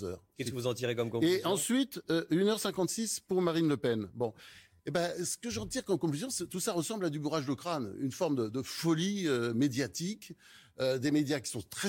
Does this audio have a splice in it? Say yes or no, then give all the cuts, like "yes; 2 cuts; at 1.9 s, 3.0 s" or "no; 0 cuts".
no; 0 cuts